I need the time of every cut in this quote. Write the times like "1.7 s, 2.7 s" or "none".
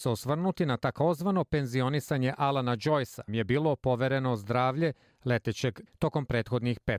3.3 s, 5.9 s